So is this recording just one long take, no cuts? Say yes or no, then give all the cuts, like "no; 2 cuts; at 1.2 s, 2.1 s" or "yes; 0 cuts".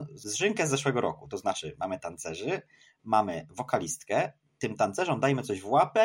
yes; 0 cuts